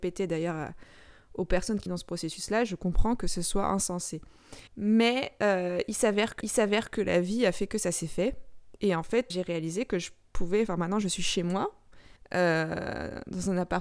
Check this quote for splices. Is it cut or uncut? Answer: cut